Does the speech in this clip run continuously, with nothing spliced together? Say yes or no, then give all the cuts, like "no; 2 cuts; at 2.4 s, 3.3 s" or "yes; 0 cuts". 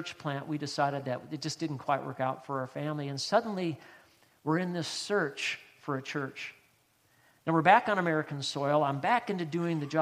yes; 0 cuts